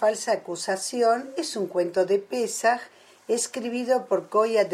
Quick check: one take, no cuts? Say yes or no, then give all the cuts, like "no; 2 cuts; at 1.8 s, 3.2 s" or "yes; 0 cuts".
yes; 0 cuts